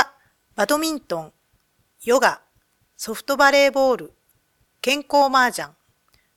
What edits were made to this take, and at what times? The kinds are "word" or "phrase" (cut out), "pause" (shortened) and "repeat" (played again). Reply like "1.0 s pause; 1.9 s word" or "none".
none

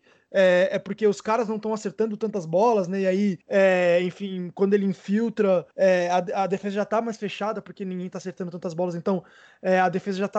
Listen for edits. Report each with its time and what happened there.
3.4 s pause; 5.7 s pause

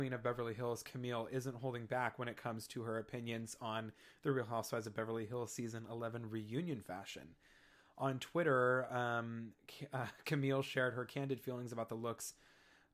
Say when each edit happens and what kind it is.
none

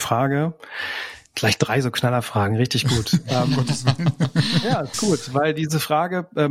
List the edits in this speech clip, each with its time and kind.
4.9 s word

